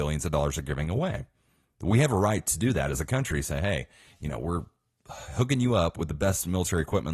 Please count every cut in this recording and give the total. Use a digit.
0